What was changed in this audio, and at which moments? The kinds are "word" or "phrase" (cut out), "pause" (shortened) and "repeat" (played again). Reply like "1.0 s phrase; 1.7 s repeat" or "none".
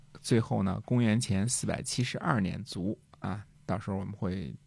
none